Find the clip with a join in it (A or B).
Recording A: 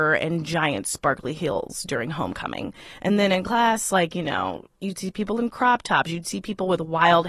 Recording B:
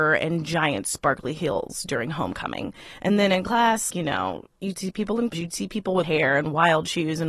B